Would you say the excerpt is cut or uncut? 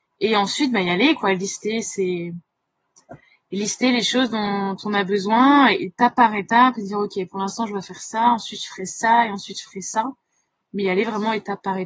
uncut